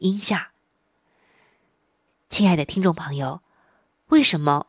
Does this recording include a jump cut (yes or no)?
no